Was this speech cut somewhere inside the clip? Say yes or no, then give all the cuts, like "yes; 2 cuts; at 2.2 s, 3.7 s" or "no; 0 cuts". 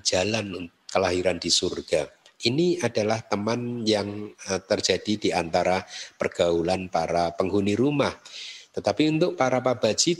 no; 0 cuts